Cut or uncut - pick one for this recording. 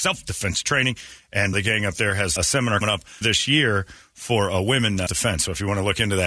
cut